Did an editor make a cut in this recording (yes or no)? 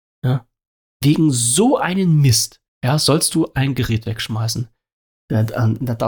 yes